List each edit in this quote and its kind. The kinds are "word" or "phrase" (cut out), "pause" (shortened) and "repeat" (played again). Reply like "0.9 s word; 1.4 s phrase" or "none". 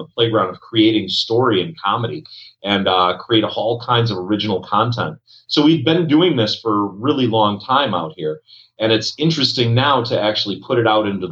none